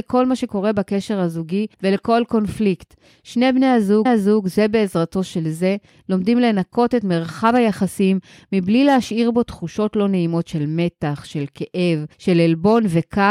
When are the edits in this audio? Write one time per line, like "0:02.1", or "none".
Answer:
0:01.7
0:04.1
0:12.1